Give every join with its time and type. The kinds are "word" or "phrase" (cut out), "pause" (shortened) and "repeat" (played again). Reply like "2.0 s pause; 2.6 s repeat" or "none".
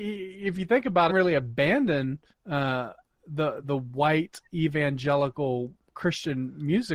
1.1 s phrase; 2.3 s pause; 3.6 s word